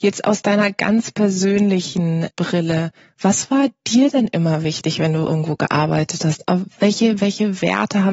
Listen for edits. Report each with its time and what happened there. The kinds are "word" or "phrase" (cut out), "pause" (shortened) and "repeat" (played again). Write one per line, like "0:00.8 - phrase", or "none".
none